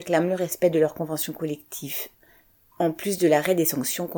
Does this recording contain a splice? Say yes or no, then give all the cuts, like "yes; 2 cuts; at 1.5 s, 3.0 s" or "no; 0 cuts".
no; 0 cuts